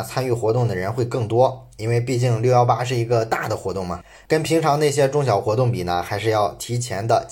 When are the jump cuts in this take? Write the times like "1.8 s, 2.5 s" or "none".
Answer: none